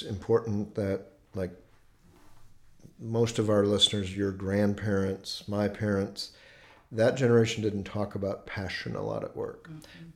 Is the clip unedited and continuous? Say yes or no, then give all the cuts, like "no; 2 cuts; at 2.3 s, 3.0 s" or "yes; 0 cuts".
yes; 0 cuts